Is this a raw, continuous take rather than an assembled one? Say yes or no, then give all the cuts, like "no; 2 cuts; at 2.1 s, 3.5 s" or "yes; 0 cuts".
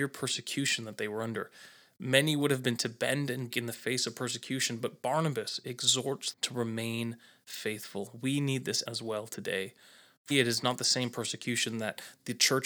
no; 5 cuts; at 2.8 s, 3.5 s, 6.3 s, 8.9 s, 10.3 s